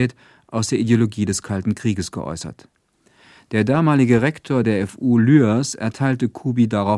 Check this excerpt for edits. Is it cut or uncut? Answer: uncut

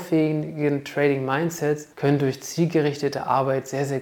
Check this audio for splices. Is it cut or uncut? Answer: cut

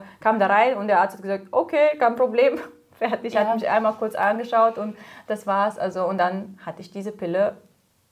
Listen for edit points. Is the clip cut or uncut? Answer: uncut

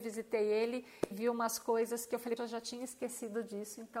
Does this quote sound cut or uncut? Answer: cut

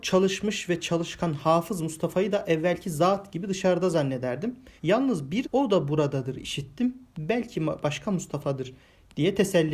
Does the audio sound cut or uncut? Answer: cut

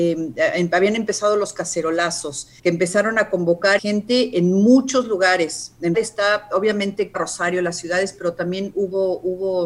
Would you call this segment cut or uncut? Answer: cut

